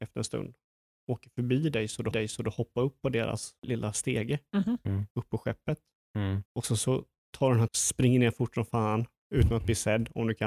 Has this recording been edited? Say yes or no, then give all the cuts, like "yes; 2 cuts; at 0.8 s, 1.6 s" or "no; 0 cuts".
yes; 5 cuts; at 2.1 s, 3.6 s, 5.1 s, 6.5 s, 7.7 s